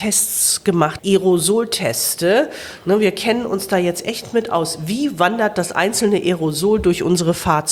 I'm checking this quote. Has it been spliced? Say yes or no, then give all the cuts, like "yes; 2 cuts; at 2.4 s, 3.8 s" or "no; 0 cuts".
yes; 1 cut; at 1.0 s